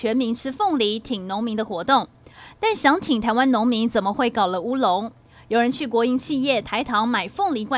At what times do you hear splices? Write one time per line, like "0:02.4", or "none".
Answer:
none